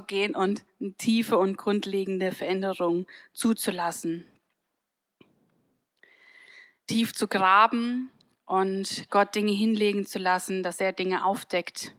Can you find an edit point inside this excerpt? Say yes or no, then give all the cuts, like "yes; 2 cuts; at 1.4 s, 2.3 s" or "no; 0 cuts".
no; 0 cuts